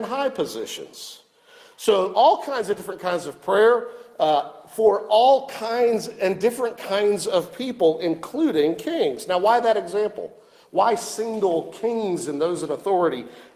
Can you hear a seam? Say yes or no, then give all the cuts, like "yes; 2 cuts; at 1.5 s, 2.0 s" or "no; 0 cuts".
no; 0 cuts